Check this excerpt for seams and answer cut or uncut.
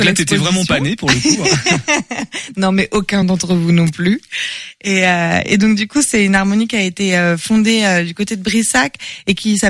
uncut